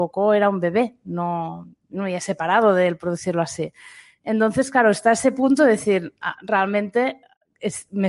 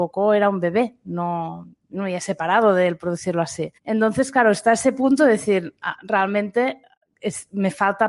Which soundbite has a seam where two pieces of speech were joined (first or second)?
second